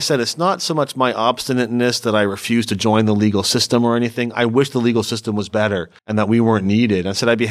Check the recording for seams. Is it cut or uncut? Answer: cut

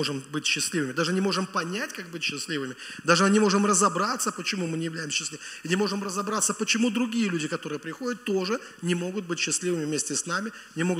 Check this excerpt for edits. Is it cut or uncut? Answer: uncut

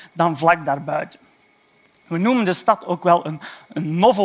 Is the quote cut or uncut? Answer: uncut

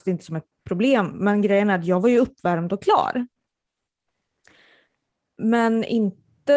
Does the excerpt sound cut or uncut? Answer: uncut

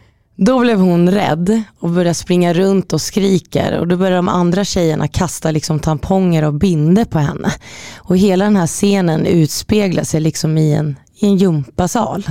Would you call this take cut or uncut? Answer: uncut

